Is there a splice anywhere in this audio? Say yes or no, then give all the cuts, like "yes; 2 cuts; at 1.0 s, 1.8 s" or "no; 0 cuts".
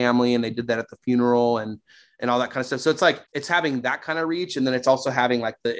yes; 1 cut; at 3.3 s